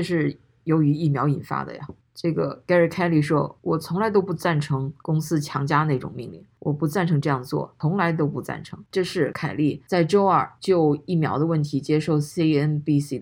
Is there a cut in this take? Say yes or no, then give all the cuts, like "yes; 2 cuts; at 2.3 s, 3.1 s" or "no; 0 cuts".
no; 0 cuts